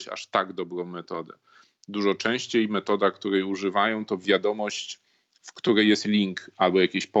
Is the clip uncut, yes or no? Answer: no